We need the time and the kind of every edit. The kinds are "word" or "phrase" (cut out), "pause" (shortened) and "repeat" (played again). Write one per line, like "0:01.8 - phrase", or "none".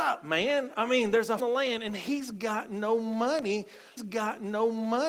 0:01.4 - phrase
0:04.0 - repeat